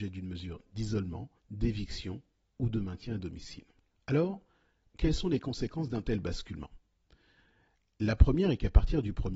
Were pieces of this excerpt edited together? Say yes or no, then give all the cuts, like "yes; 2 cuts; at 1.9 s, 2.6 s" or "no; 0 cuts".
yes; 2 cuts; at 1.4 s, 3.9 s